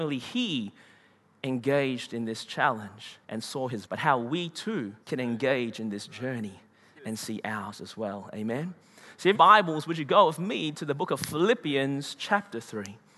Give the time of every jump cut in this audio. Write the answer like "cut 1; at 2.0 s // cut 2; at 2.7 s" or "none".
cut 1; at 3.2 s // cut 2; at 3.9 s // cut 3; at 5.0 s // cut 4; at 9.3 s